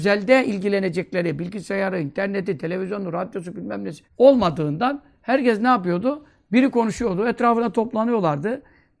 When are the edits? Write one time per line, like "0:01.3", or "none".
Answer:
0:04.1